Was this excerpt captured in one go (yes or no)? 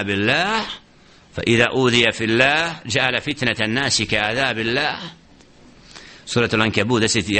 yes